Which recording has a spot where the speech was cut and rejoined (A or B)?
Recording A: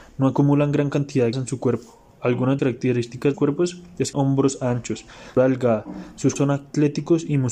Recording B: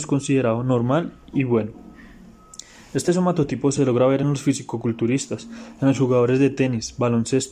A